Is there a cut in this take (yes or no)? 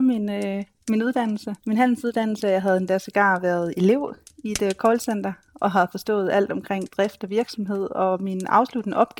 yes